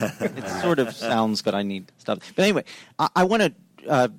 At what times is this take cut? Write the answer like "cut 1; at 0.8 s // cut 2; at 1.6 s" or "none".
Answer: cut 1; at 1.4 s // cut 2; at 1.9 s // cut 3; at 2.9 s